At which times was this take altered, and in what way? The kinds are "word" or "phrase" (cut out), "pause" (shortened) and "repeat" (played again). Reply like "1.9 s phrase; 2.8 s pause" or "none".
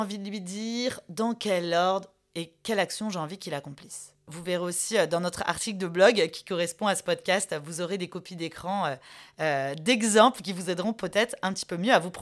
none